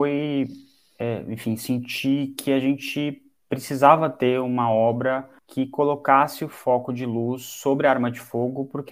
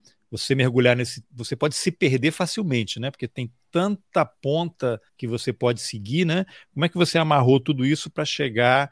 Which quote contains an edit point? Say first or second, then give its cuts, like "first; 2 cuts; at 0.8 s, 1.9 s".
second; 2 cuts; at 1.2 s, 5.1 s